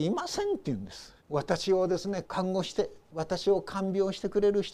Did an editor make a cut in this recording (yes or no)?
yes